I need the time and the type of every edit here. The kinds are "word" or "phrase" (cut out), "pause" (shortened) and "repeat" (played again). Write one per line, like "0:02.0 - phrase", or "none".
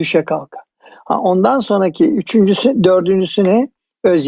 none